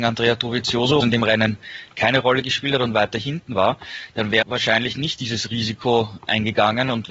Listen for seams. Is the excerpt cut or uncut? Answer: cut